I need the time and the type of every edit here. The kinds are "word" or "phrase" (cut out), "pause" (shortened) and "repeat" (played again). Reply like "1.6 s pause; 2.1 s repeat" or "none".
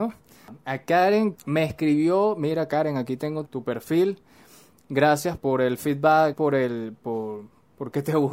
1.3 s word; 3.5 s word; 5.4 s word; 6.3 s word